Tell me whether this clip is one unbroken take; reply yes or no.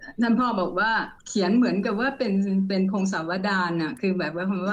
no